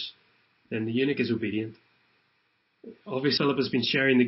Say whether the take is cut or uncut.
cut